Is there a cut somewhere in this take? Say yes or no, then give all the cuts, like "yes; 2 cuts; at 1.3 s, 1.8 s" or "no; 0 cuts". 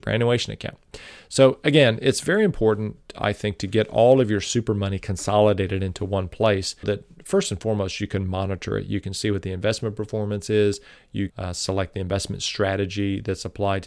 yes; 2 cuts; at 6.8 s, 11.3 s